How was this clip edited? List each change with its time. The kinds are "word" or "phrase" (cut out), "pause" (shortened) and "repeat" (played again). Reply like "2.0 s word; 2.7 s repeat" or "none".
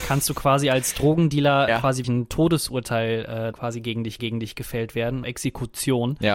1.7 s word; 2.0 s word; 3.5 s word; 4.2 s repeat; 5.2 s word